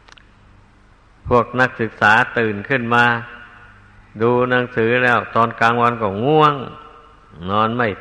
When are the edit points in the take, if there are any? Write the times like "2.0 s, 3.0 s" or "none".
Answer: none